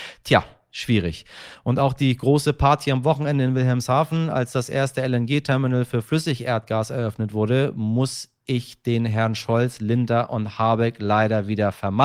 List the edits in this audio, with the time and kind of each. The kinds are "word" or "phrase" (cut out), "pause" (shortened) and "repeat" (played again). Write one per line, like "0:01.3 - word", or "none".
none